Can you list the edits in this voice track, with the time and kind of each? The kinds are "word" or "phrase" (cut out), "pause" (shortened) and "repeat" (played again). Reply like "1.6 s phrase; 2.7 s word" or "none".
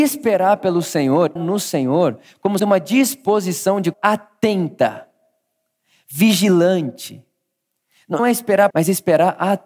1.4 s word; 2.6 s word; 3.9 s word; 8.2 s word; 8.7 s word